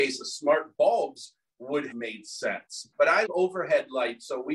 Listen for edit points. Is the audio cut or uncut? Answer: cut